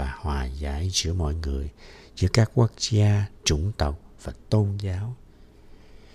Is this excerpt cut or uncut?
uncut